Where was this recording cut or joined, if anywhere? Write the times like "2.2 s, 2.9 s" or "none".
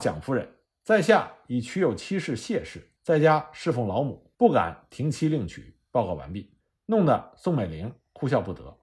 3.0 s, 4.3 s, 6.6 s